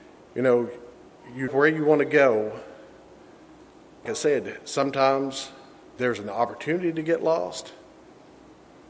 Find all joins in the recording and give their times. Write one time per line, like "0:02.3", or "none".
0:01.5
0:04.1